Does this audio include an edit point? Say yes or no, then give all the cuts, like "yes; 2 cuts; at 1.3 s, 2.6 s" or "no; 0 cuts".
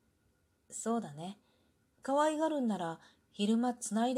no; 0 cuts